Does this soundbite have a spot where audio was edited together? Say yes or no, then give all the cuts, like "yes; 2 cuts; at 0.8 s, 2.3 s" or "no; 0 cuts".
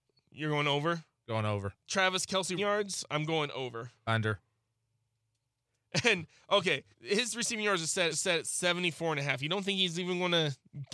yes; 5 cuts; at 1.8 s, 2.6 s, 4.0 s, 6.9 s, 8.1 s